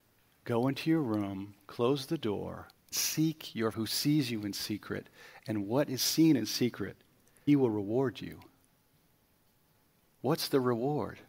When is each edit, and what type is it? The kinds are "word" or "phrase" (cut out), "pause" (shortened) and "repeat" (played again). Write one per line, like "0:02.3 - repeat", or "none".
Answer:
0:02.9 - word
0:03.7 - word
0:07.5 - word